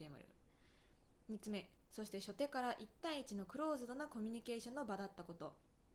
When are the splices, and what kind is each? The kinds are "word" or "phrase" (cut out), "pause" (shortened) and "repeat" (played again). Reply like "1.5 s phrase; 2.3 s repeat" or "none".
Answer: 1.8 s pause